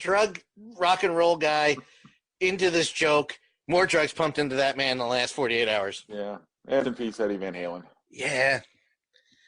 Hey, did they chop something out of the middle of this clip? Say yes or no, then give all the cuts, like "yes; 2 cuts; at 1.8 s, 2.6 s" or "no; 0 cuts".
yes; 1 cut; at 6.8 s